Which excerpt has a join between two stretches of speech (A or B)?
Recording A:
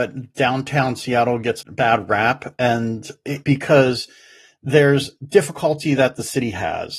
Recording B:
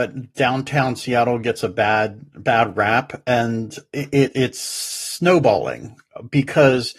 A